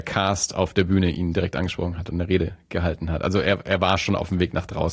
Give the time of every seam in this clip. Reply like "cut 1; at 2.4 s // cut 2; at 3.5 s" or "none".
none